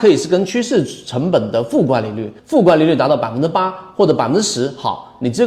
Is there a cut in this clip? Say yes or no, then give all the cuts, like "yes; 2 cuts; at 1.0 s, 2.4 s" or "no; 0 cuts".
yes; 1 cut; at 2.4 s